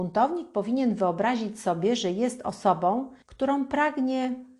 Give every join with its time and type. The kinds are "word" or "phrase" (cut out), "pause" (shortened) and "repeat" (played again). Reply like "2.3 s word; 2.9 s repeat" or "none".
3.2 s pause